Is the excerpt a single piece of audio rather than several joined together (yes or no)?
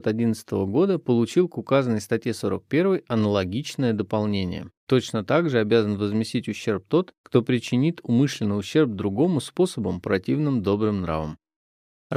no